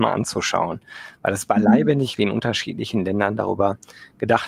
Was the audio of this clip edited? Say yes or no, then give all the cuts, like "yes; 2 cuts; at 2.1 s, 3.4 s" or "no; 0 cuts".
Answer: yes; 1 cut; at 2.2 s